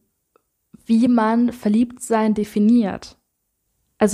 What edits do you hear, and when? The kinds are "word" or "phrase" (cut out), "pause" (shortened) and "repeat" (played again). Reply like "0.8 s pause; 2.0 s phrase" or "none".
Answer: none